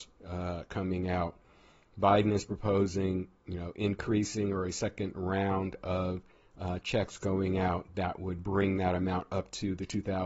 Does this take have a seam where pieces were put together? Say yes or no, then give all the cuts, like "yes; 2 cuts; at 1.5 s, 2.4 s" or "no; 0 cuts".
no; 0 cuts